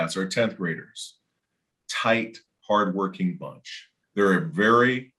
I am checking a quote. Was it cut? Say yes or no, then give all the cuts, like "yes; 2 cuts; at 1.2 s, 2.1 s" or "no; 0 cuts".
yes; 2 cuts; at 1.8 s, 4.0 s